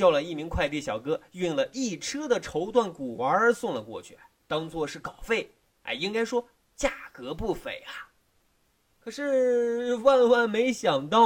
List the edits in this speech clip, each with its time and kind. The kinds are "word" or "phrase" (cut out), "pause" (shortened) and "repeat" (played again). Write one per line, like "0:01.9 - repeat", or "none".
none